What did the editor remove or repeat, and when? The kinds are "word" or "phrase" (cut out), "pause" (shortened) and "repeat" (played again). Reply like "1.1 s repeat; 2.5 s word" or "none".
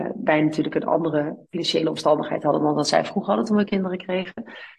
1.4 s pause